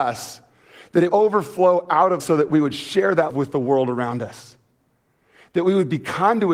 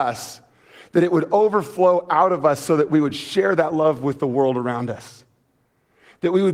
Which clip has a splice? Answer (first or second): first